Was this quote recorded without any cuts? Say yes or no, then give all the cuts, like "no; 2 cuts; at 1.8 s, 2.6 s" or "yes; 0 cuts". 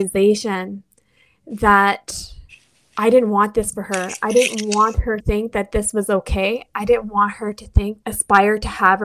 no; 2 cuts; at 5.2 s, 8.0 s